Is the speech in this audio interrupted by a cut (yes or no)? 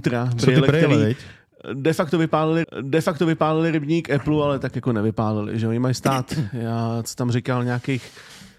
yes